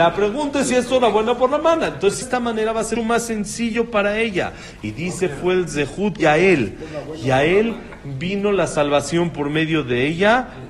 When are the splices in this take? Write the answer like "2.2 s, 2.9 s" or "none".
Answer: 2.2 s, 3.0 s, 5.2 s, 6.2 s